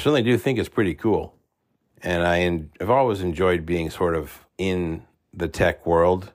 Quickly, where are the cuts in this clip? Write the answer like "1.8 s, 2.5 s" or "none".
1.6 s, 4.5 s